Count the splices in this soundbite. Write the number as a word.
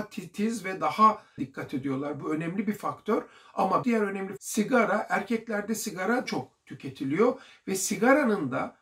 four